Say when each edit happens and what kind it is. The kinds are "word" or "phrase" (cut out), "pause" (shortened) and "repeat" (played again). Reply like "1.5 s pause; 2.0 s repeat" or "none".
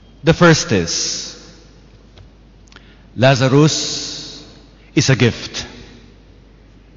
none